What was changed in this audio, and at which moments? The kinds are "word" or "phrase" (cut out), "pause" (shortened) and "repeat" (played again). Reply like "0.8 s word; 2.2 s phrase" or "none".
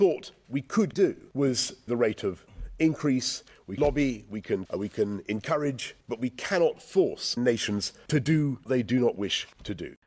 0.9 s word; 1.9 s word; 3.8 s word; 4.7 s word; 7.4 s word; 8.7 s word